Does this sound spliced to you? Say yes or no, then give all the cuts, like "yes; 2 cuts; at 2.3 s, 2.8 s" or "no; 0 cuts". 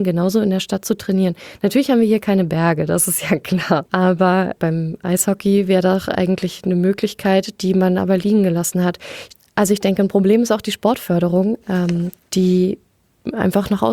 no; 0 cuts